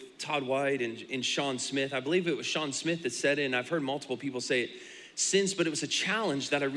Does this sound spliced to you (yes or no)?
no